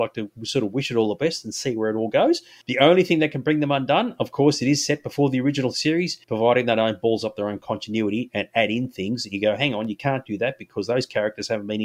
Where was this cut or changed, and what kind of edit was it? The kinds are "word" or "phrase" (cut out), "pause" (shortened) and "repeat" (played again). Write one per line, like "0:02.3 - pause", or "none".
0:06.2 - pause